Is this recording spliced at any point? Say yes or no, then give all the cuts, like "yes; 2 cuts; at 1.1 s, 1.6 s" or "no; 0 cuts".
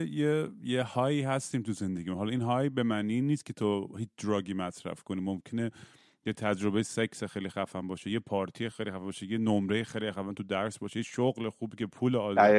no; 0 cuts